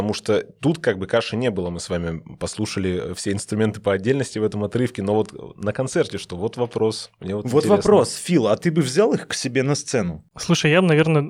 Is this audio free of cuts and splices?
yes; 0 cuts

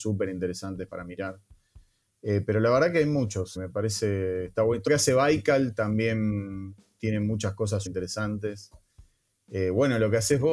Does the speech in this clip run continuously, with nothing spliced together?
no; 3 cuts; at 3.6 s, 4.9 s, 7.9 s

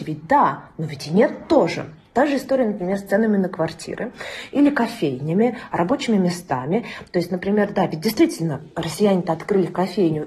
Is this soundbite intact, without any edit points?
yes; 0 cuts

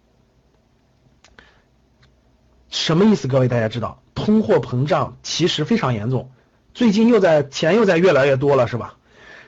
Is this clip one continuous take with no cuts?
yes; 0 cuts

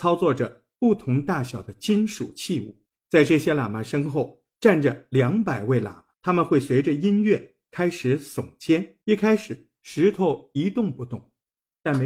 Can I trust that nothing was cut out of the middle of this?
no; 3 cuts; at 2.9 s, 6.1 s, 9.0 s

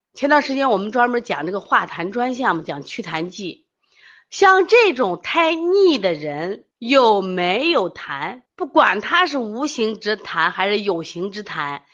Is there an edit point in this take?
yes; 2 cuts; at 6.7 s, 8.5 s

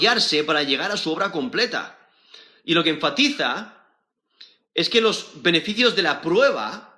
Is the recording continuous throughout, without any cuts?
yes; 0 cuts

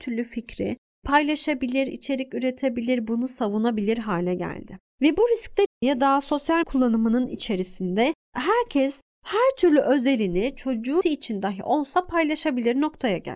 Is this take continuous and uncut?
no; 3 cuts; at 5.7 s, 6.6 s, 11.0 s

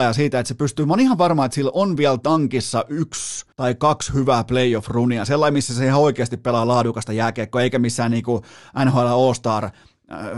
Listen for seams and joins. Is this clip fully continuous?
no; 1 cut; at 3.5 s

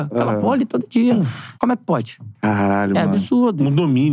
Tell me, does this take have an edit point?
yes; 1 cut; at 1.5 s

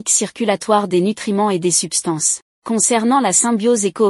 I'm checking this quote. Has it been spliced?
yes; 1 cut; at 2.5 s

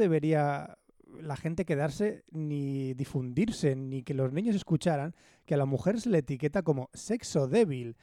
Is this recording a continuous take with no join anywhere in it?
yes; 0 cuts

